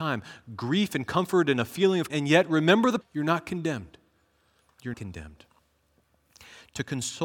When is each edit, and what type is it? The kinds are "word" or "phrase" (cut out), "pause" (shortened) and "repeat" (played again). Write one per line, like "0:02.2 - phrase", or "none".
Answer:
0:02.1 - word
0:03.0 - word
0:04.9 - word